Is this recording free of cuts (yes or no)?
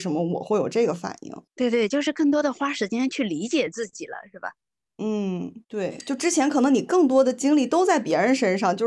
no